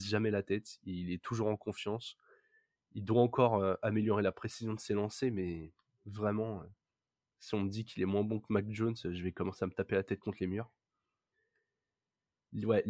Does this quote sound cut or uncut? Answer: uncut